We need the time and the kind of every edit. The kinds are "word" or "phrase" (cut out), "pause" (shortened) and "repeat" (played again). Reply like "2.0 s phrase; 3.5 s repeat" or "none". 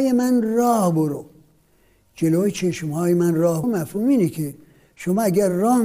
3.6 s word